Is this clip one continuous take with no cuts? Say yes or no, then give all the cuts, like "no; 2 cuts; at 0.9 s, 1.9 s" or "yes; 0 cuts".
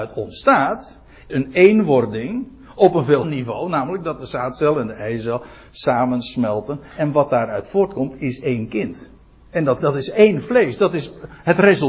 no; 4 cuts; at 1.3 s, 3.2 s, 9.2 s, 9.8 s